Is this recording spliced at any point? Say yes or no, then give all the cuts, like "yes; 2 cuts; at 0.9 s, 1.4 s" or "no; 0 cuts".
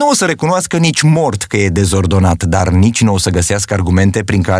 no; 0 cuts